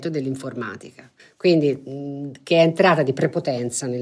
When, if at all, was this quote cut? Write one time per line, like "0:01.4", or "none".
0:01.2